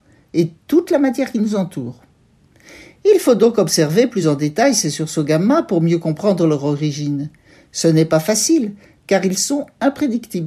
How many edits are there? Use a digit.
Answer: 0